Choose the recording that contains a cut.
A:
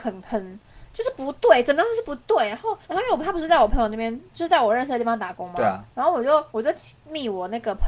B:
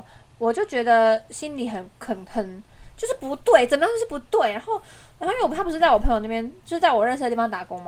A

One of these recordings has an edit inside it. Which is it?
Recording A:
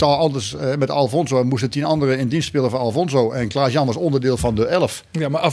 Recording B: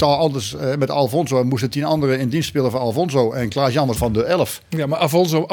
B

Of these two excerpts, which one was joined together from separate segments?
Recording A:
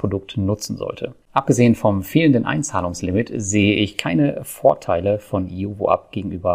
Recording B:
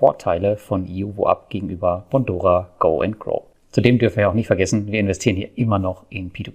A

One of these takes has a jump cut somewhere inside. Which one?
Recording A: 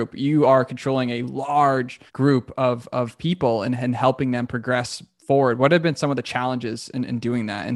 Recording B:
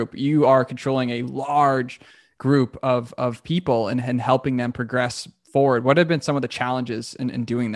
A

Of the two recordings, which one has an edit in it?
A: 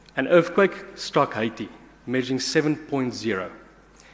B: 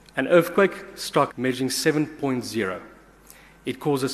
B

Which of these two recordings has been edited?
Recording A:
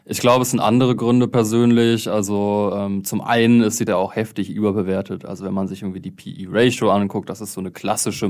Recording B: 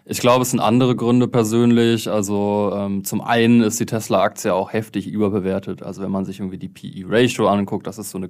A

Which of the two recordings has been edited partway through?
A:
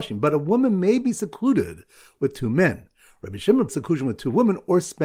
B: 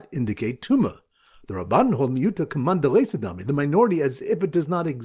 A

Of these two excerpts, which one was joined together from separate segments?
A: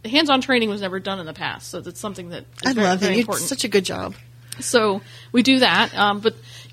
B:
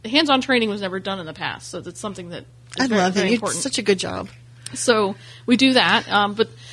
A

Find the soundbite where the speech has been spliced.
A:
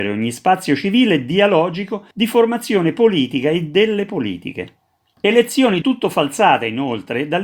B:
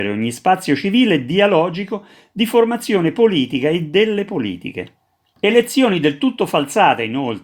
A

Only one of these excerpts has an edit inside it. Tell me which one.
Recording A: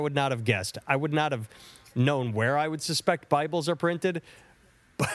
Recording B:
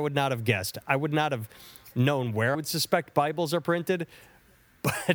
B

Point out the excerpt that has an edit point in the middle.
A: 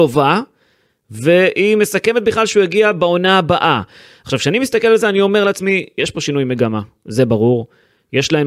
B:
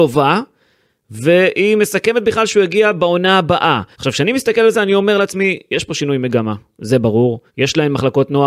B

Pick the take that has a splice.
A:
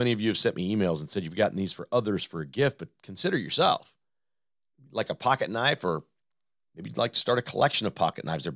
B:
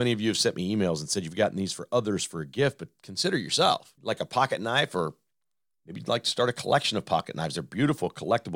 B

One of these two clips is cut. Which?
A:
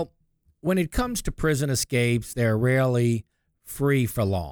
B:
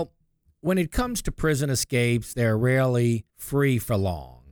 B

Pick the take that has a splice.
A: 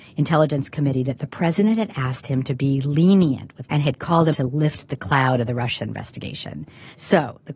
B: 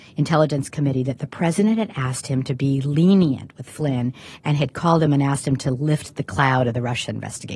A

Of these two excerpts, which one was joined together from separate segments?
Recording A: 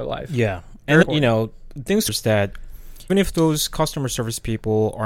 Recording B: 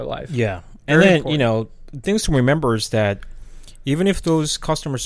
A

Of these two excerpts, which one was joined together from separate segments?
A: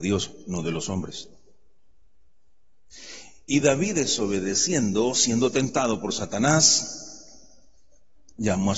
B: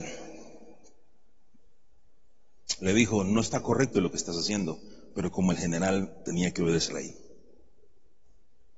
B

